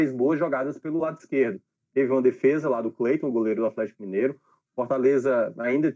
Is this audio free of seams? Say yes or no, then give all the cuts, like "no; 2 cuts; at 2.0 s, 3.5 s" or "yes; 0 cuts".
yes; 0 cuts